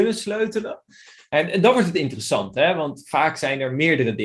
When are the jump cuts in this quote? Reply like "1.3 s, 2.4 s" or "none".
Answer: none